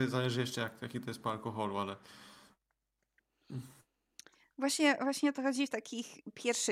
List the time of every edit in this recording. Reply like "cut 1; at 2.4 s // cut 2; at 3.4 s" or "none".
none